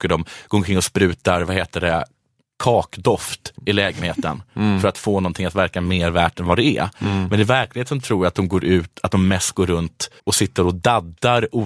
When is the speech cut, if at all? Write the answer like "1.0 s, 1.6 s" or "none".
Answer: 3.6 s, 10.2 s